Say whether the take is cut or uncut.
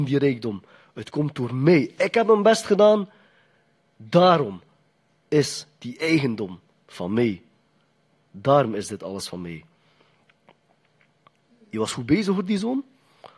uncut